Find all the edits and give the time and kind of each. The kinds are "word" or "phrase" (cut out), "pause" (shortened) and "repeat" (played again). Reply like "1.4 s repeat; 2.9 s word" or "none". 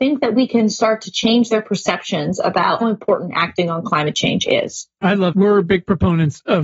2.8 s word; 5.0 s pause; 5.3 s word